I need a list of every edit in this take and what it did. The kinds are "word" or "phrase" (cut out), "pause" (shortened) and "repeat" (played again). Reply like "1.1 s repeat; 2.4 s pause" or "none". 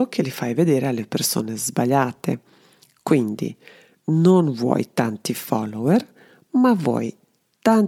none